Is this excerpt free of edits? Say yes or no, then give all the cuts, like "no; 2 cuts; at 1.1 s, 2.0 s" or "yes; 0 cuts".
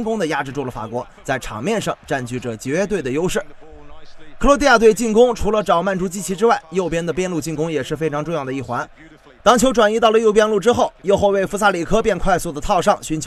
yes; 0 cuts